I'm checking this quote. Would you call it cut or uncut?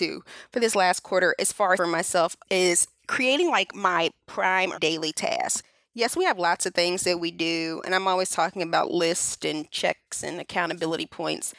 cut